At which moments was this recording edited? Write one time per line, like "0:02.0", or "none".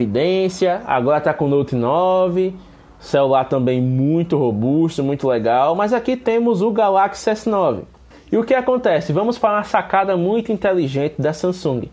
0:08.1